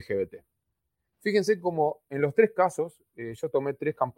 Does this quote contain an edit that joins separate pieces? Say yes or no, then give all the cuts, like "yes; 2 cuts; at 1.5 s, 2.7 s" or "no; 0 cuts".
no; 0 cuts